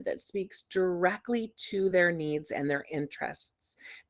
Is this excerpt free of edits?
yes; 0 cuts

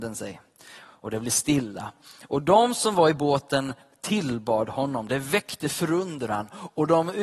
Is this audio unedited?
yes; 0 cuts

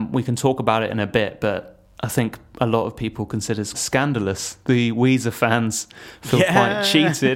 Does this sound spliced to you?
yes; 1 cut; at 3.7 s

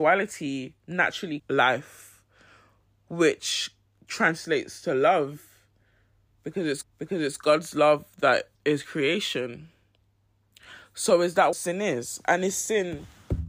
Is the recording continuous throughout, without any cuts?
no; 5 cuts; at 1.4 s, 3.9 s, 6.8 s, 8.5 s, 11.5 s

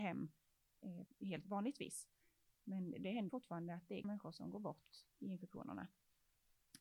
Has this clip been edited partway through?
yes; 4 cuts; at 1.1 s, 1.4 s, 3.3 s, 4.0 s

